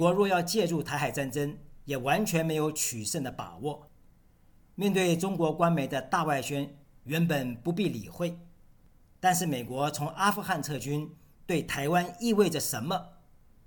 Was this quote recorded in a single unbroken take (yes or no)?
yes